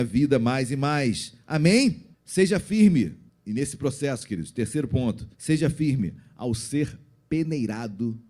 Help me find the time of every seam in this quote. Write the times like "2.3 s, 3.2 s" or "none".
2.1 s, 3.3 s, 5.3 s